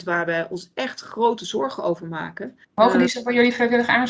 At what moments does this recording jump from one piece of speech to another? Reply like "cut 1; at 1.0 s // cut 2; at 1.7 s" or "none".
cut 1; at 2.6 s